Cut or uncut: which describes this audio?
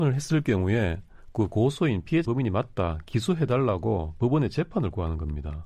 cut